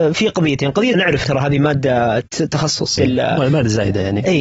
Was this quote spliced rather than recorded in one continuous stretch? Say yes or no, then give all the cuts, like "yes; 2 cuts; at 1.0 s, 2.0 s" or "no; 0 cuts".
yes; 3 cuts; at 0.9 s, 1.2 s, 3.0 s